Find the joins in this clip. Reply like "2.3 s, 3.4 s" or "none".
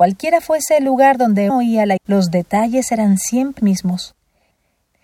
1.5 s, 2.0 s, 3.6 s